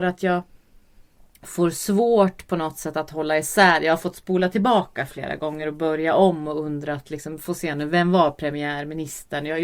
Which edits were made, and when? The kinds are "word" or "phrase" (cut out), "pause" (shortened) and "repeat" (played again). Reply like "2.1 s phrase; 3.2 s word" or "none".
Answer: none